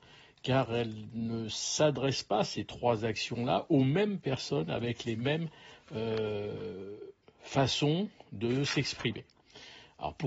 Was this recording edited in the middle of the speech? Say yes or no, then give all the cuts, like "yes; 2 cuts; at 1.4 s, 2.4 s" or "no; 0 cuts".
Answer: no; 0 cuts